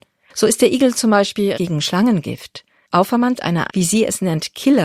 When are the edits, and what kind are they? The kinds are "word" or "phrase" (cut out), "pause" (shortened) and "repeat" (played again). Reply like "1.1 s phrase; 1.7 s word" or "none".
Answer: 1.5 s word; 3.4 s word; 3.7 s word